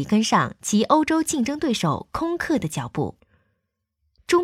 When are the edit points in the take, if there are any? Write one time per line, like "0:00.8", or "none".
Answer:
none